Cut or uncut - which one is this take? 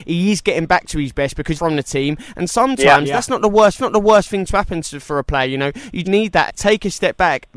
cut